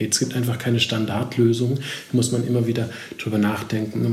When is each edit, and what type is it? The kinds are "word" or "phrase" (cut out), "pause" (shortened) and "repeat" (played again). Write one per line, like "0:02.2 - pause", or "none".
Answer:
none